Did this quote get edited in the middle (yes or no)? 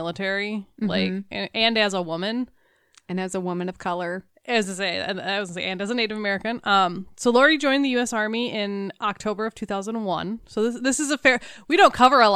no